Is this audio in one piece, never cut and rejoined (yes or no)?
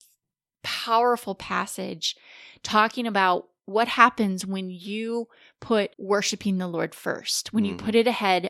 no